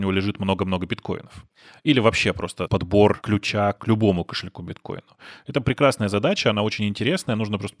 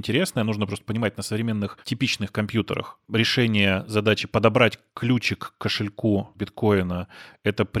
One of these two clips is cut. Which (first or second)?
second